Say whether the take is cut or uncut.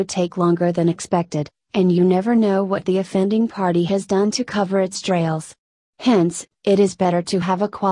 uncut